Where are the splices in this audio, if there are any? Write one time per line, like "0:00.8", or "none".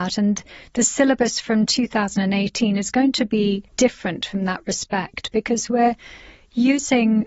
0:03.7